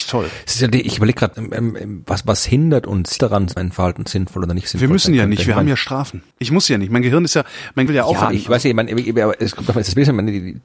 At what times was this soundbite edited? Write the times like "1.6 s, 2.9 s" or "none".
1.3 s, 3.2 s, 3.6 s, 6.3 s, 7.9 s, 8.3 s